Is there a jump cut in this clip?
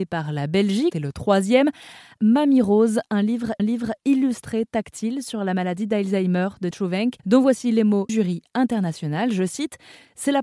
yes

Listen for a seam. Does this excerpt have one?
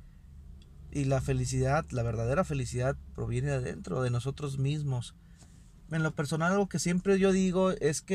no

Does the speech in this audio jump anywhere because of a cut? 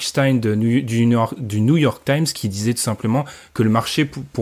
no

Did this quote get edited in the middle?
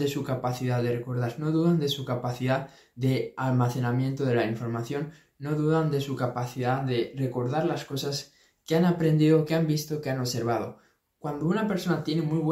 no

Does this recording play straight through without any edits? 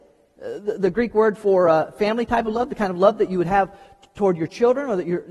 yes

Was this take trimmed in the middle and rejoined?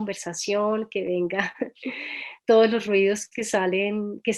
no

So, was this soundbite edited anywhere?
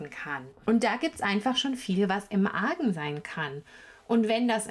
no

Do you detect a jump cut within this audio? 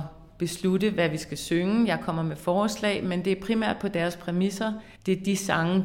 yes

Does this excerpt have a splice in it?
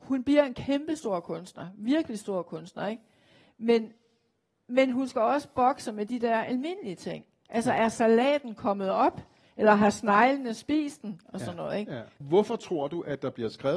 no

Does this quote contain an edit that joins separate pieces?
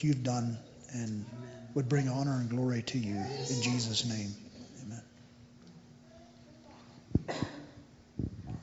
no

